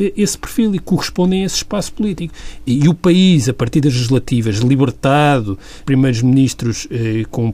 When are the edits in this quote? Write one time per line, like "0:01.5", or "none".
0:05.8